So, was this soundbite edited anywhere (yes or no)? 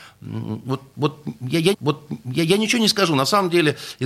yes